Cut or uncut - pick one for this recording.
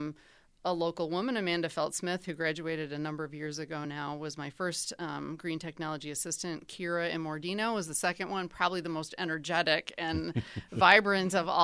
uncut